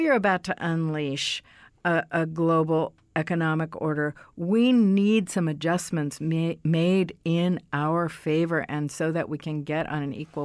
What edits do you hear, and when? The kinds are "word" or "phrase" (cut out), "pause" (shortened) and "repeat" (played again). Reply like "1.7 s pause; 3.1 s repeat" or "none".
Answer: none